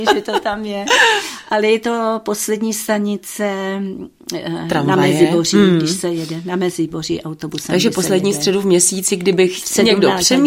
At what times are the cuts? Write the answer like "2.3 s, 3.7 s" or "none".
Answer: none